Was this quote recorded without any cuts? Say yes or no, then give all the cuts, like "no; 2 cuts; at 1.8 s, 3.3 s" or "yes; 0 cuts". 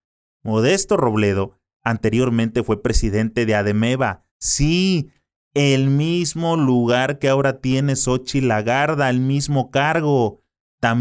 no; 1 cut; at 4.3 s